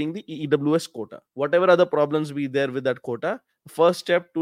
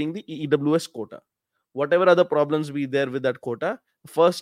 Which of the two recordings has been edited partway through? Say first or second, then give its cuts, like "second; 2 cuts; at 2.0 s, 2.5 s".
first; 1 cut; at 1.2 s